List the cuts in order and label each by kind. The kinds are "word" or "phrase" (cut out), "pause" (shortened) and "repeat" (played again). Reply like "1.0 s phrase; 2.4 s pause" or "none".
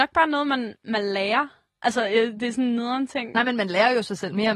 none